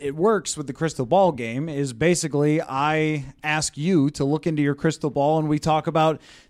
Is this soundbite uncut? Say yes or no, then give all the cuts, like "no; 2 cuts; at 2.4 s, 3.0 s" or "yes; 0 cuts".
yes; 0 cuts